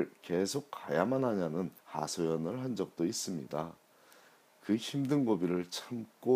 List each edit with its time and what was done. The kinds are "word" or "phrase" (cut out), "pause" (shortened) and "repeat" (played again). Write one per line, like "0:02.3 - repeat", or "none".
0:01.8 - pause